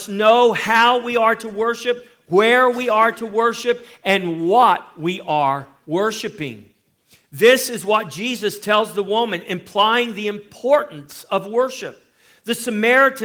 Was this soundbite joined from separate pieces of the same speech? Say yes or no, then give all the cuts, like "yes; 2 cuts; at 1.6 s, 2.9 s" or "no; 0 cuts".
no; 0 cuts